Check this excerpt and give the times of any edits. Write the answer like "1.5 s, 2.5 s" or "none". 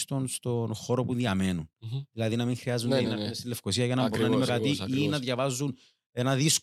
3.0 s, 4.5 s

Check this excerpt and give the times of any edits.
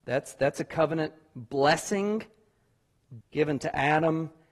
3.2 s

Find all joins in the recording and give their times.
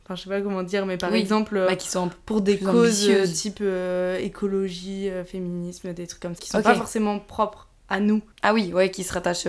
6.4 s, 8.3 s

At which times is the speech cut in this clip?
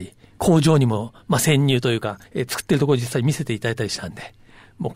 2.3 s

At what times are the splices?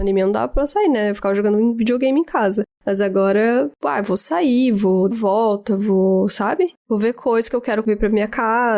5.1 s

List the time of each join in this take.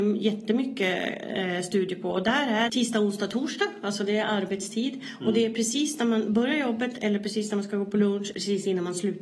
2.7 s, 8.3 s

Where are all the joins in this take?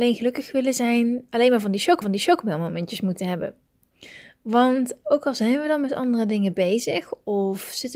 2.0 s

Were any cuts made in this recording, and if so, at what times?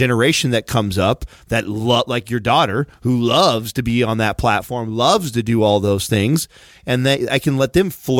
none

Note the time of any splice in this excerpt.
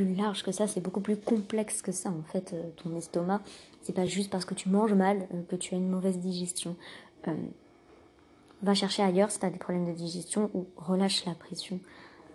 none

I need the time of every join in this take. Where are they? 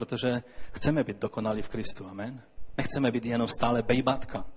none

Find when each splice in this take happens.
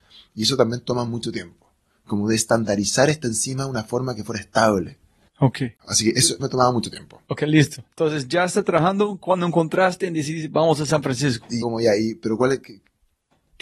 5.8 s, 6.4 s, 11.6 s

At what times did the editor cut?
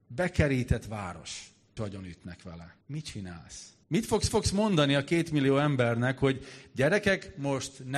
1.8 s, 2.8 s, 3.8 s, 4.3 s

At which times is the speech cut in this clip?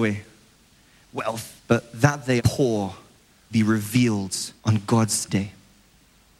1.6 s, 2.4 s, 3.5 s, 4.6 s, 5.3 s

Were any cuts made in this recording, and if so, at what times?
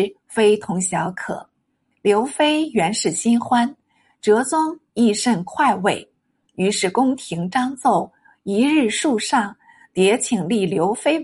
none

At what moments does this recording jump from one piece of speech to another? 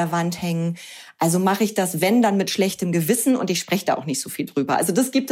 none

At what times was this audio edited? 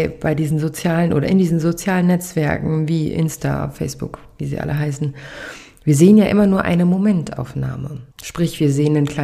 8.1 s

